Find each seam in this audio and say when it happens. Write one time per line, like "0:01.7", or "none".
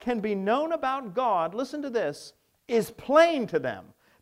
none